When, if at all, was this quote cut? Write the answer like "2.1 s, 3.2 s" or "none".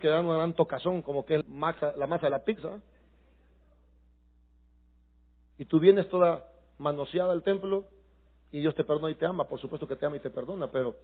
1.4 s